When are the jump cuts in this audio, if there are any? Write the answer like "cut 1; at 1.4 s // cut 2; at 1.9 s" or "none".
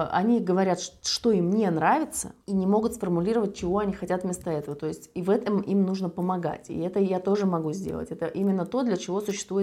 cut 1; at 2.4 s